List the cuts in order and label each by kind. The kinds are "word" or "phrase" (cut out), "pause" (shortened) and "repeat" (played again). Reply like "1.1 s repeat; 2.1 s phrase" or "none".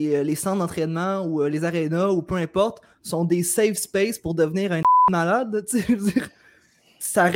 none